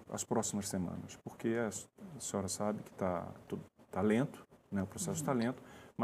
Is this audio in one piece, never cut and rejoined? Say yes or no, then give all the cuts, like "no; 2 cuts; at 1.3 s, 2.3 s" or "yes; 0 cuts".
yes; 0 cuts